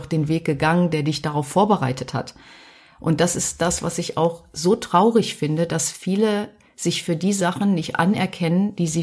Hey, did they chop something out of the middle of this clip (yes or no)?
no